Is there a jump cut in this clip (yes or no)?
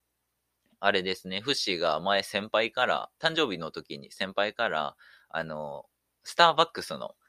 no